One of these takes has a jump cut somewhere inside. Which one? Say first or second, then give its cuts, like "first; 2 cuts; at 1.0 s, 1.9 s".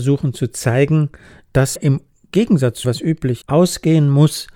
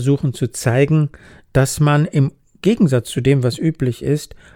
first; 3 cuts; at 1.8 s, 2.8 s, 3.4 s